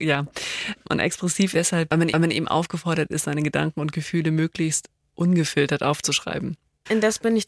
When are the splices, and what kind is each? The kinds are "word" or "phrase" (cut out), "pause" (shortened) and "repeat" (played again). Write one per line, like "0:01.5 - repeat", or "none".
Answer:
0:01.5 - word
0:02.1 - repeat

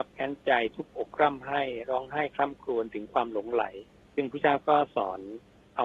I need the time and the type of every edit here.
0:03.9 - pause

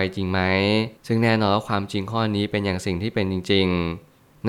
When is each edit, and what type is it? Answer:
0:01.0 - pause

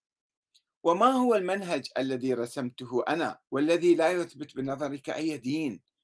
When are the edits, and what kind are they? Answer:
0:03.5 - pause

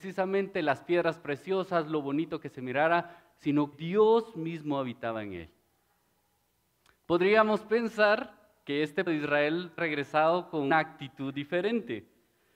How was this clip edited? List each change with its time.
0:03.7 - word
0:09.1 - word
0:09.8 - word
0:10.7 - word

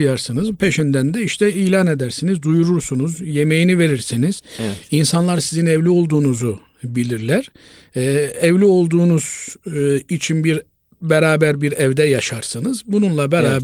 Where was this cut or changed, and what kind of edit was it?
none

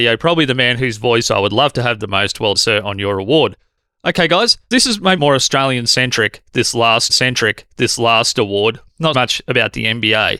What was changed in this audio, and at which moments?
0:02.5 - word
0:05.2 - phrase
0:07.1 - repeat
0:09.1 - word

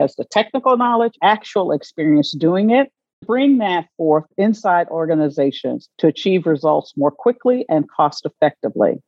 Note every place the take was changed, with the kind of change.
0:01.2 - phrase
0:03.2 - word
0:05.9 - pause

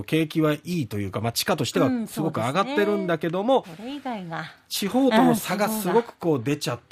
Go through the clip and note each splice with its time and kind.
0:03.6 - word

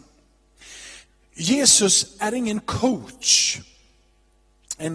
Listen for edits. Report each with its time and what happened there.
none

